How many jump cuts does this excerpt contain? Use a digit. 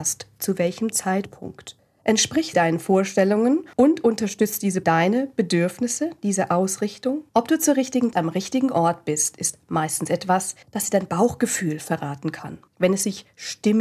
7